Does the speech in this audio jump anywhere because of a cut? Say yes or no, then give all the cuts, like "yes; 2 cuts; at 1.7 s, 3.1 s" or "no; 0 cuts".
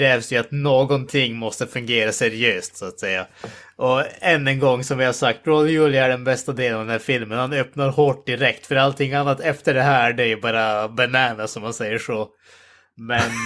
no; 0 cuts